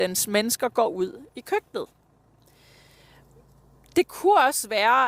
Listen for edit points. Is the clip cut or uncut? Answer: uncut